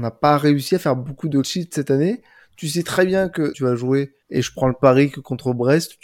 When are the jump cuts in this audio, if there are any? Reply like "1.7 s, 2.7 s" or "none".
1.4 s, 3.5 s, 4.2 s